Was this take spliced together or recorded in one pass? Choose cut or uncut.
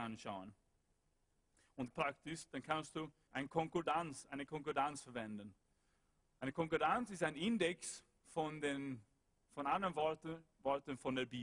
cut